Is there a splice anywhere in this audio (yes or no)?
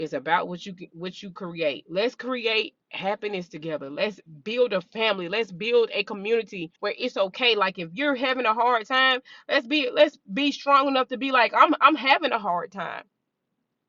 yes